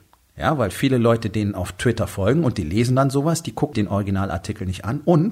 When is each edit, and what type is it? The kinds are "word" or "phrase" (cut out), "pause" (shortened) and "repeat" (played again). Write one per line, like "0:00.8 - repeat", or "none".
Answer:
0:03.7 - word